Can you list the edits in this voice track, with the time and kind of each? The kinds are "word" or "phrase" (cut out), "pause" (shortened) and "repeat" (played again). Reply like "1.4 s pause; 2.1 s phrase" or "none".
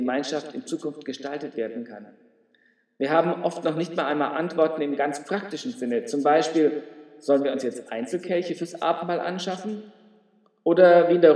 none

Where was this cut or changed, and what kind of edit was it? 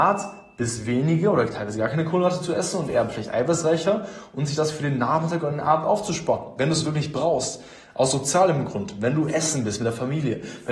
none

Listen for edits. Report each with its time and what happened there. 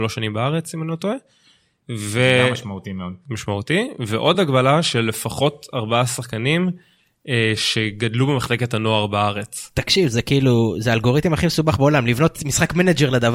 none

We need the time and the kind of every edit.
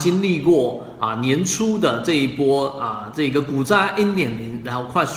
none

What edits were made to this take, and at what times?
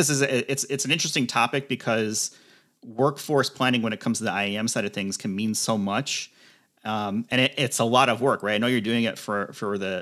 none

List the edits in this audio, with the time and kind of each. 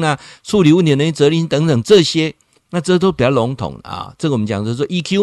none

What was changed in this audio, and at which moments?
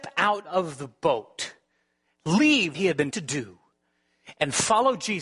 2.7 s word; 3.1 s word

